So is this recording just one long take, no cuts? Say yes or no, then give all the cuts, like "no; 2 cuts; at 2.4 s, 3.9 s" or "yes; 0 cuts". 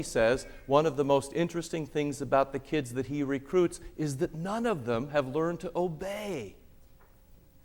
yes; 0 cuts